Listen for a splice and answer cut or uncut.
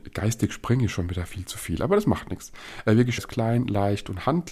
cut